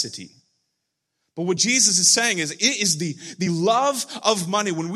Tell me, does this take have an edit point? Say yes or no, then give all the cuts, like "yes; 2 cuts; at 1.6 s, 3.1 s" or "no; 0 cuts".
no; 0 cuts